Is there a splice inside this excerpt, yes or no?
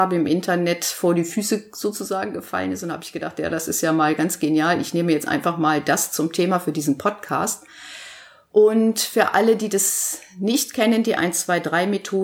no